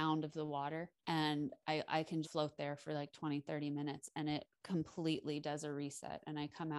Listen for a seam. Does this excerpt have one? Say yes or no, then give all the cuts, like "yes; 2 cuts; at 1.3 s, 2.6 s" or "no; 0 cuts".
yes; 2 cuts; at 1.0 s, 2.2 s